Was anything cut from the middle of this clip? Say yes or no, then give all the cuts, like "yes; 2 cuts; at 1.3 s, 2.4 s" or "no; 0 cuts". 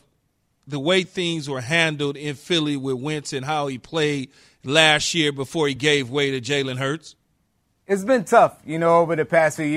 no; 0 cuts